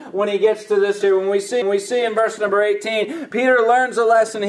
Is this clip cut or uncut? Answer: cut